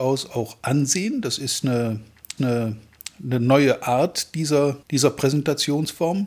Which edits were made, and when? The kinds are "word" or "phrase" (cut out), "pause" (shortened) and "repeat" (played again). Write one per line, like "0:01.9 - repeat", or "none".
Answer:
0:02.4 - repeat
0:04.8 - pause